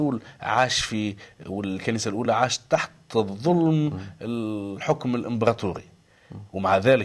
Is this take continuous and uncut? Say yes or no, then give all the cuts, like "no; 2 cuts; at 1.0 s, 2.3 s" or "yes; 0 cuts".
yes; 0 cuts